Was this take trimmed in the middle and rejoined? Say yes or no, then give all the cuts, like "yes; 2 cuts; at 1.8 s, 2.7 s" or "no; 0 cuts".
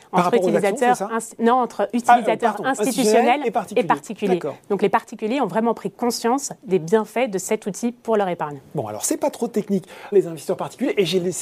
yes; 1 cut; at 10.1 s